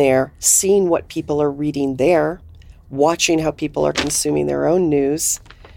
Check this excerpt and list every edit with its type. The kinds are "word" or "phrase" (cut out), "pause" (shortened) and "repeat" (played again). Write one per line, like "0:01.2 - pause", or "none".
none

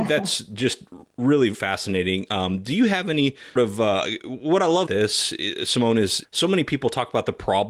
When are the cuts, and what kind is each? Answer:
0:01.5 - word
0:03.6 - word
0:04.9 - word
0:06.2 - word

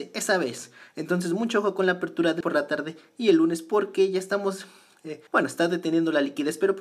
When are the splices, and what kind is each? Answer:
0:02.4 - word
0:05.3 - pause

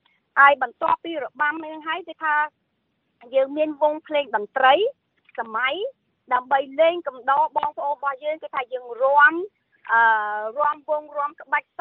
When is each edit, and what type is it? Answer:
none

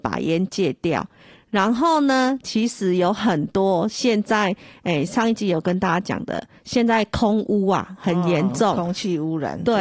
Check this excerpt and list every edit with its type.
none

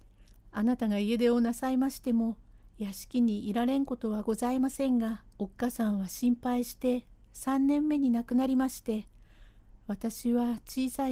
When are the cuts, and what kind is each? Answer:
0:05.3 - pause

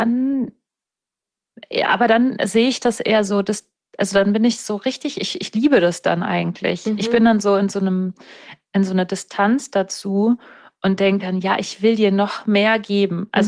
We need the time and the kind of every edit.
none

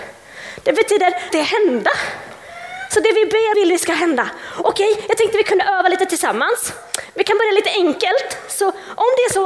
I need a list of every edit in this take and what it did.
0:01.3 - word
0:03.5 - phrase

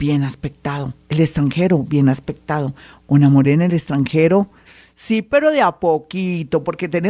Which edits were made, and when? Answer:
none

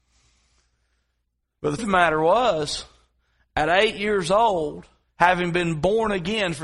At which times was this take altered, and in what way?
0:01.8 - word
0:05.0 - pause

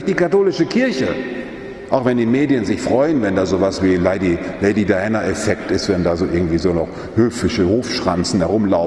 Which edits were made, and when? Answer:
none

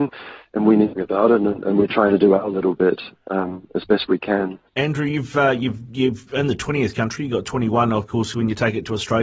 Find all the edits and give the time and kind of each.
0:01.0 - phrase
0:04.7 - pause

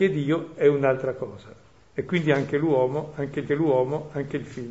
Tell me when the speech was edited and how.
0:01.6 - pause
0:03.5 - repeat

